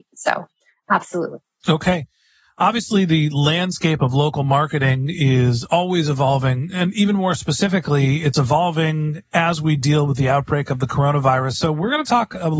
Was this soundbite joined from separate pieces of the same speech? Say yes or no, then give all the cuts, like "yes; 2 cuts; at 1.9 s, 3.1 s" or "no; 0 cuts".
no; 0 cuts